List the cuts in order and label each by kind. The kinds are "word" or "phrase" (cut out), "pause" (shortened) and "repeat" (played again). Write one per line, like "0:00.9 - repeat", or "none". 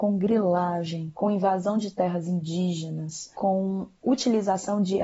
none